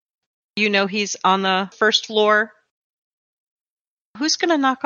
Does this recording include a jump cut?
no; 0 cuts

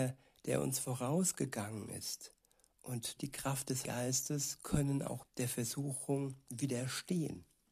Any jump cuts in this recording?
yes; 3 cuts; at 3.2 s, 3.8 s, 5.2 s

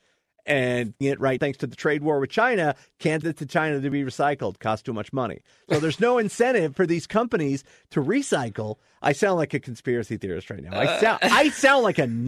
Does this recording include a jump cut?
yes; 3 cuts; at 1.0 s, 1.4 s, 3.2 s

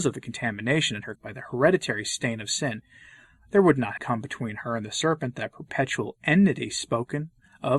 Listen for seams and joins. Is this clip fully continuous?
no; 2 cuts; at 1.2 s, 4.0 s

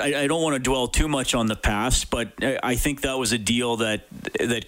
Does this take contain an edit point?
no; 0 cuts

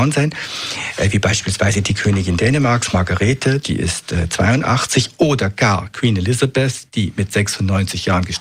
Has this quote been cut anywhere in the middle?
no; 0 cuts

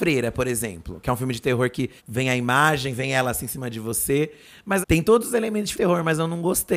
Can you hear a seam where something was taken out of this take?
yes; 3 cuts; at 2.0 s, 4.8 s, 5.7 s

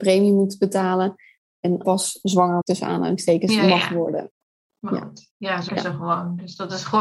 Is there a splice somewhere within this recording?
yes; 3 cuts; at 1.8 s, 2.6 s, 5.7 s

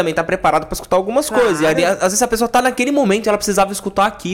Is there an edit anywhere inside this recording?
no; 0 cuts

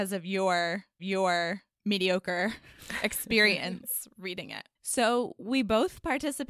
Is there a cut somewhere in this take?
yes; 2 cuts; at 1.0 s, 4.8 s

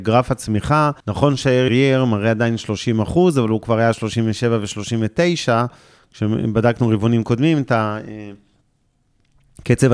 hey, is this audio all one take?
no; 2 cuts; at 1.0 s, 1.7 s

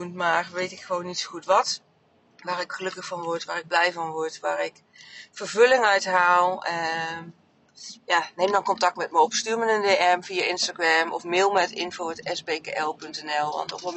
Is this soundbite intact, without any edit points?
yes; 0 cuts

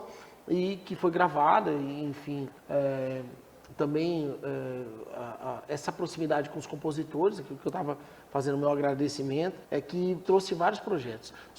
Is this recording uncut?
no; 3 cuts; at 2.6 s, 9.6 s, 10.2 s

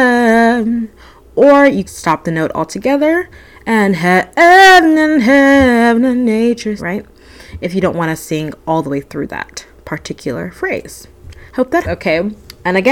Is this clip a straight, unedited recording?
no; 4 cuts; at 1.8 s, 6.8 s, 11.5 s, 11.8 s

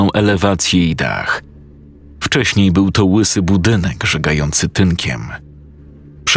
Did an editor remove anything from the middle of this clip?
no; 0 cuts

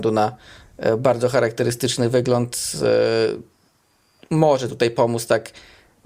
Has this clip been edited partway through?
no; 0 cuts

